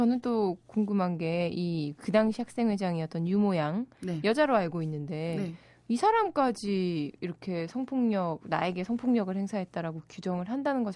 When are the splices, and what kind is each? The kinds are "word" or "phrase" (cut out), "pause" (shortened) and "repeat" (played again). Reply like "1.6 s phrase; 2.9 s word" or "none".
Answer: none